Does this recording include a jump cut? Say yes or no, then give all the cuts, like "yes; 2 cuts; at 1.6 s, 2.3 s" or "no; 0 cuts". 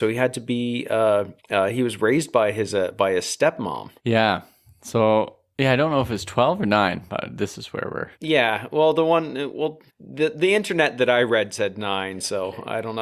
yes; 4 cuts; at 1.4 s, 4.0 s, 8.1 s, 9.9 s